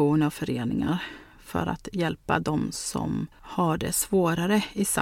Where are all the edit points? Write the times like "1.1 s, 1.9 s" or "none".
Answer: 3.3 s